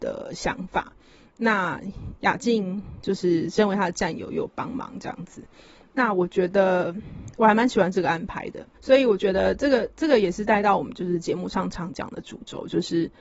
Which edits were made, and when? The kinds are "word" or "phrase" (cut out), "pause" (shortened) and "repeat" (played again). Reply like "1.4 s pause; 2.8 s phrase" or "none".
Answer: 8.7 s pause

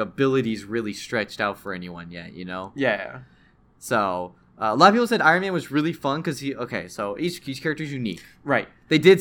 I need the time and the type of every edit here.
none

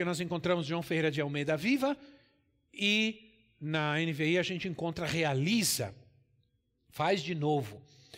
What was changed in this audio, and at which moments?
none

